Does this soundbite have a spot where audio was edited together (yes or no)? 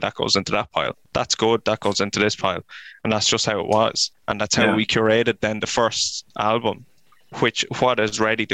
yes